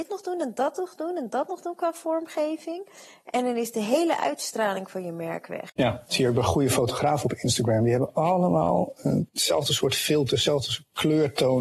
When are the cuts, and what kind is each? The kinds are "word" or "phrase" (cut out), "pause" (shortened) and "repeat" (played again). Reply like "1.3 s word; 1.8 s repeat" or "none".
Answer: none